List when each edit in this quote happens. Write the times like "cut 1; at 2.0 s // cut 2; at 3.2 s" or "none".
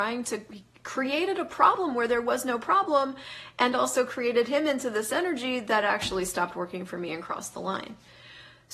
none